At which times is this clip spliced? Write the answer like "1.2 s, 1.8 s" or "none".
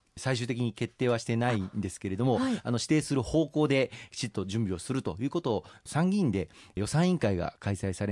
none